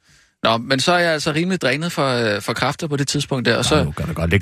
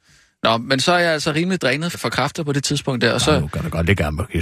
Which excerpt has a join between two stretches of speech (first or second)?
second